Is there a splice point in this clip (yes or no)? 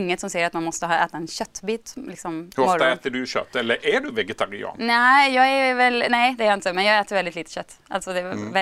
no